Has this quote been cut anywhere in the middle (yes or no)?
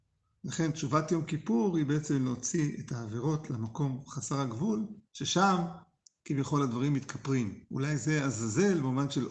yes